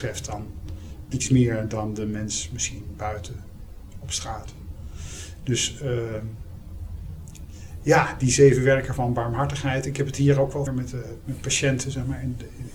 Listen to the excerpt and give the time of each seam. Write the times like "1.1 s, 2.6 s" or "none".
1.1 s, 10.7 s